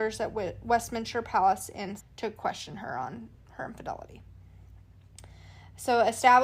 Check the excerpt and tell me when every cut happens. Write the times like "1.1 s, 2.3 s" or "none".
2.0 s

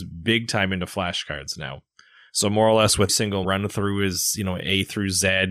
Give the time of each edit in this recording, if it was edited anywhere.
3.1 s, 3.4 s

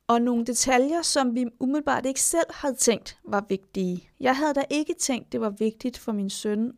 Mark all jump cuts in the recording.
4.1 s

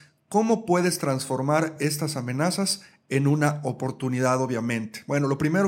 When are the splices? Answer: none

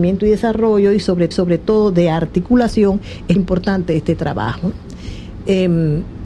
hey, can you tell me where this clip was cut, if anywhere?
1.3 s, 3.4 s

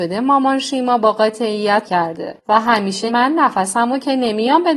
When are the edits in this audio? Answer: 1.8 s, 3.1 s

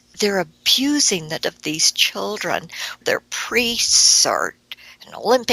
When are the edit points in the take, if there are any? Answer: 1.4 s, 3.0 s

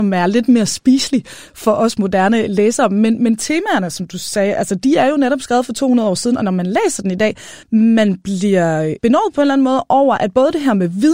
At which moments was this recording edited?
7.6 s

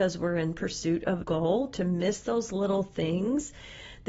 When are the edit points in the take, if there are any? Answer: 1.2 s

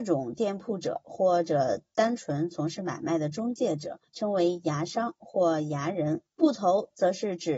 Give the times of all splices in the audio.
4.1 s, 6.3 s

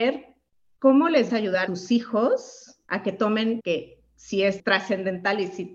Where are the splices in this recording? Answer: 1.3 s, 1.7 s, 2.9 s, 3.6 s

